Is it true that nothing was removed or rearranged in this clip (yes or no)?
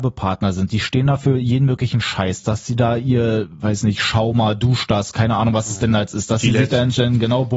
yes